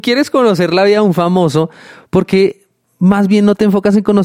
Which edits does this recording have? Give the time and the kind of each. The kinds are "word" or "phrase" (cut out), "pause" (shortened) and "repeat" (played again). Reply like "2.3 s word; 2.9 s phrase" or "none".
none